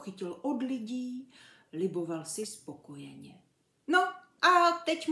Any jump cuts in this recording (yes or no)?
no